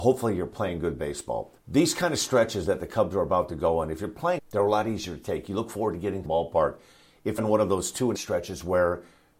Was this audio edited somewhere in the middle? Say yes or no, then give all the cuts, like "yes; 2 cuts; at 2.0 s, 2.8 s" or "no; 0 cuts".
yes; 5 cuts; at 1.6 s, 4.4 s, 6.2 s, 7.4 s, 8.1 s